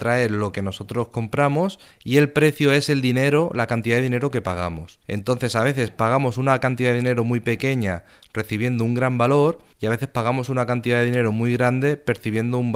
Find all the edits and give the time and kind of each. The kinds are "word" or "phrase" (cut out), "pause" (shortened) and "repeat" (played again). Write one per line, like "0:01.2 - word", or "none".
none